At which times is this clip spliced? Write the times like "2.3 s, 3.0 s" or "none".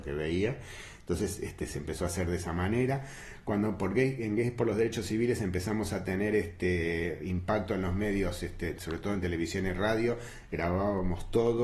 none